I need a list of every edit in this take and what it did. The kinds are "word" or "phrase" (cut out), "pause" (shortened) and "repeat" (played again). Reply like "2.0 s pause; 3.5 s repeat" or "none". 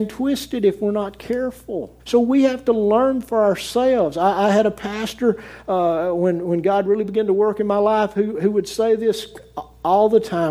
2.0 s pause

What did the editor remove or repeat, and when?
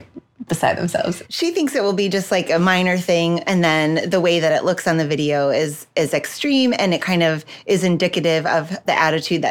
none

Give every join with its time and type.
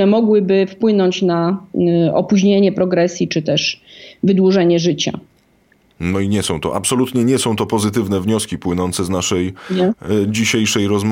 none

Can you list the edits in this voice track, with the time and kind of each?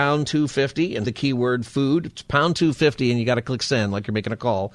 1.0 s word

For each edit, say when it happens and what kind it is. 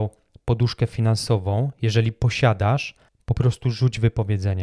3.1 s pause

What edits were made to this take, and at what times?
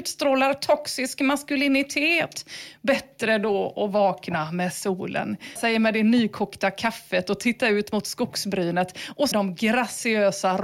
5.6 s word; 9.3 s word

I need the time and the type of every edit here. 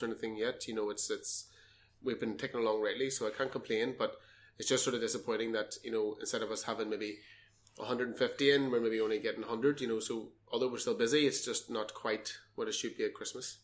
none

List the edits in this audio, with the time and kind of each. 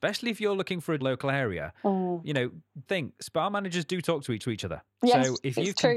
1.0 s phrase; 2.9 s word; 4.4 s repeat

